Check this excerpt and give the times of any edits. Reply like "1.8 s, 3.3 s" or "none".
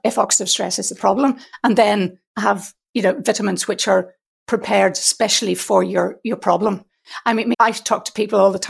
2.3 s, 7.5 s